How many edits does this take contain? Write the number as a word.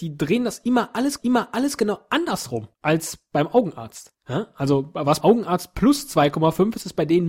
three